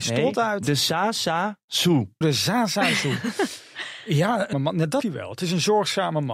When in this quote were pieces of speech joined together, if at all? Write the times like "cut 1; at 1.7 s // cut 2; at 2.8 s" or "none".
cut 1; at 2.2 s // cut 2; at 4.5 s // cut 3; at 5.0 s